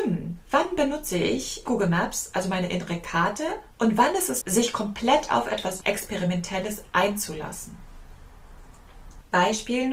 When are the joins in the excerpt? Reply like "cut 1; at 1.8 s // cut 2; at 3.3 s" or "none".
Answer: cut 1; at 1.7 s // cut 2; at 3.7 s // cut 3; at 4.4 s // cut 4; at 5.8 s

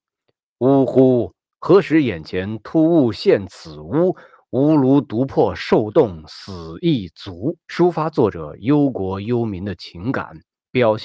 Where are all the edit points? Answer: cut 1; at 7.6 s

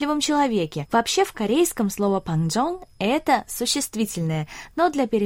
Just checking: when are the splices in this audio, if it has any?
none

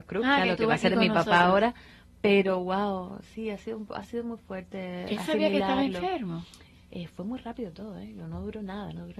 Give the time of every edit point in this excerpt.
none

